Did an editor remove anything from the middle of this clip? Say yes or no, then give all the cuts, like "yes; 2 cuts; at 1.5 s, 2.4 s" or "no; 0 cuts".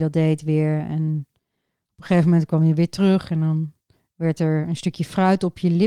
no; 0 cuts